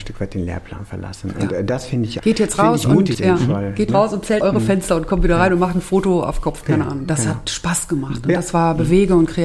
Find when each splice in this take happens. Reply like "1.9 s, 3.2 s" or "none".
2.2 s, 3.1 s, 3.9 s, 4.4 s